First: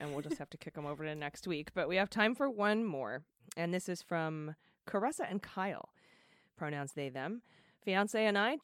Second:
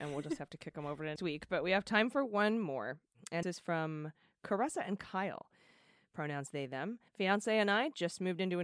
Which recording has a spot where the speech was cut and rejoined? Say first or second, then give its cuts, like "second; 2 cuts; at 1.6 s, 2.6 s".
second; 3 cuts; at 1.2 s, 3.4 s, 7.1 s